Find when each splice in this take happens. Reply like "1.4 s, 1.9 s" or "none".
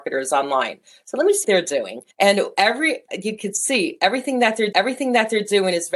1.4 s, 2.1 s, 3.1 s, 4.7 s